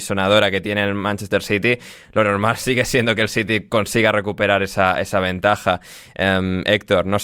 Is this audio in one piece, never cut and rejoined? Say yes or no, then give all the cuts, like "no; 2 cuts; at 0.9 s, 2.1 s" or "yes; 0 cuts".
yes; 0 cuts